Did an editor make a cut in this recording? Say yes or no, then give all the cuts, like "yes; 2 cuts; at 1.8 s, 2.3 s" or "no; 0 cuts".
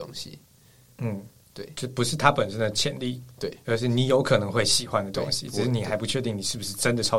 no; 0 cuts